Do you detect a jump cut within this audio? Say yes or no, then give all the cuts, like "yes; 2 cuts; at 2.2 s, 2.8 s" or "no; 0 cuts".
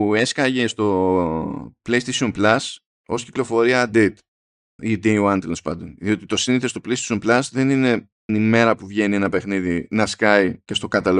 yes; 3 cuts; at 3.9 s, 4.8 s, 8.3 s